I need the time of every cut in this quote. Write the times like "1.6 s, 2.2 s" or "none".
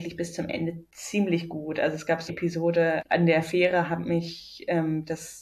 2.3 s, 3.0 s